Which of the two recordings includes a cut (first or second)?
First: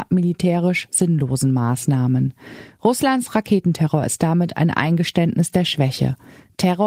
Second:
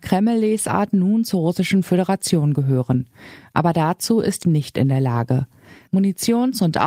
second